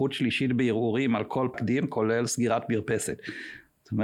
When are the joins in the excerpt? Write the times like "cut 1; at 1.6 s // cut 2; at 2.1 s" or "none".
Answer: cut 1; at 1.5 s